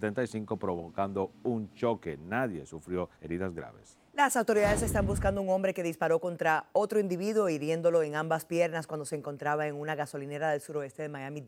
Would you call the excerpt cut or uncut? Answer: cut